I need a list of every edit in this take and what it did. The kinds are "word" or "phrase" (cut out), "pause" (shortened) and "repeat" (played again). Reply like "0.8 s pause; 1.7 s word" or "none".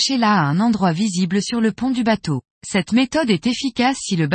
2.5 s pause